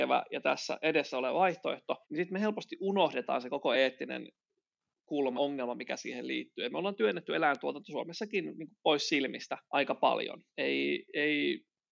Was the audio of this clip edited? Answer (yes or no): yes